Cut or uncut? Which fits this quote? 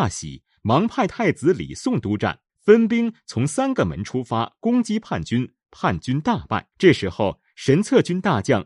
cut